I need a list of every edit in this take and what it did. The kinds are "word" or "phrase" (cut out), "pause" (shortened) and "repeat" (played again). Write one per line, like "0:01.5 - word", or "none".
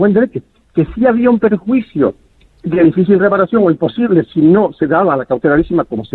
none